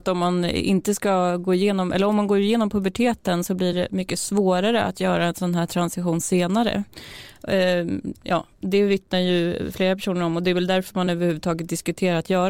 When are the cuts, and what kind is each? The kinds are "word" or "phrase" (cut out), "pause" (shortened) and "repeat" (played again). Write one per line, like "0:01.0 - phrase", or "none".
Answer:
none